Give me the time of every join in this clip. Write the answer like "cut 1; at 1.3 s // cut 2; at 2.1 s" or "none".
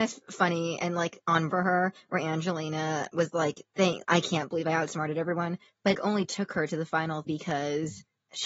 cut 1; at 1.5 s // cut 2; at 4.0 s // cut 3; at 6.0 s // cut 4; at 7.3 s